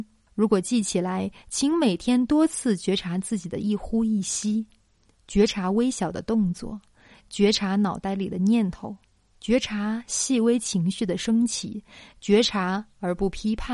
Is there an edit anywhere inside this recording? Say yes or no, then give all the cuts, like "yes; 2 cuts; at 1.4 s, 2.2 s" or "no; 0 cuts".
no; 0 cuts